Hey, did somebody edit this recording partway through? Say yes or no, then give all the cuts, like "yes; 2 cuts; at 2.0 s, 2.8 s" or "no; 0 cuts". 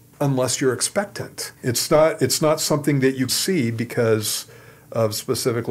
yes; 2 cuts; at 1.6 s, 3.3 s